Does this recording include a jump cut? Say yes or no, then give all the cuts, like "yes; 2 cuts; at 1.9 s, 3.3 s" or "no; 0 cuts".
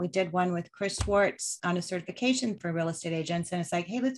yes; 2 cuts; at 1.6 s, 2.6 s